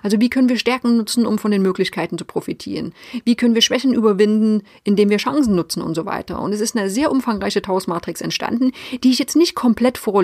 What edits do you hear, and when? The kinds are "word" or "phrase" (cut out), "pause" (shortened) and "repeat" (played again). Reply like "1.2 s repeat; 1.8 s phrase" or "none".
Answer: none